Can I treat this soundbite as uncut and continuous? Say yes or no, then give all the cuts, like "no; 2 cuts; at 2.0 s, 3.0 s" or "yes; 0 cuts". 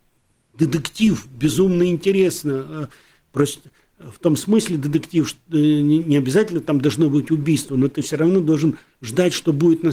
yes; 0 cuts